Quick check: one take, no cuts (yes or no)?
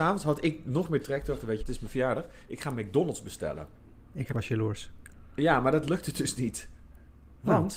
no